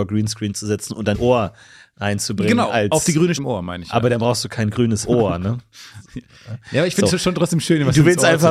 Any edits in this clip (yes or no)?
yes